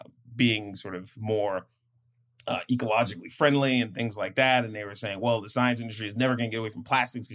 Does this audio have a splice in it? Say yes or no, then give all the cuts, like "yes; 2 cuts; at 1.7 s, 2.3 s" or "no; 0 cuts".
no; 0 cuts